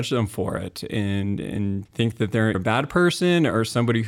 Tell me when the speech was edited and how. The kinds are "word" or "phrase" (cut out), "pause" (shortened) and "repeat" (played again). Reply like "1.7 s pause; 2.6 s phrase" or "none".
1.9 s word; 2.5 s word